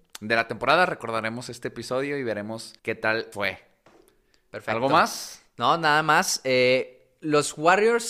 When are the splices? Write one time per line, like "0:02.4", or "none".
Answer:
0:02.8
0:03.3